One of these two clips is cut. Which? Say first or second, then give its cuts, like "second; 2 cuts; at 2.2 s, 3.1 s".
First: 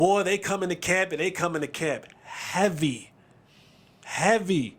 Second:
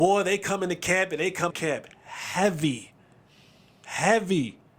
second; 1 cut; at 1.5 s